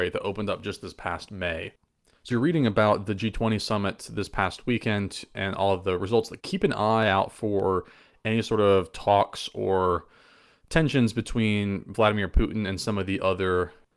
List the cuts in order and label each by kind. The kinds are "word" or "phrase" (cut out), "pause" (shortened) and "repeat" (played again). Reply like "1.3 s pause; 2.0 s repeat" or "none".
2.3 s word; 6.4 s phrase